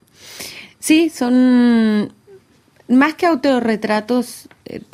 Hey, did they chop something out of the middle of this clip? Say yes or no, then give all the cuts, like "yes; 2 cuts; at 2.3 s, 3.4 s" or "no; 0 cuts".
no; 0 cuts